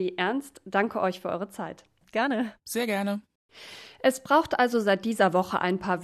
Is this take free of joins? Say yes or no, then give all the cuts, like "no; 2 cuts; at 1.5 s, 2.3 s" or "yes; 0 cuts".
no; 1 cut; at 2.6 s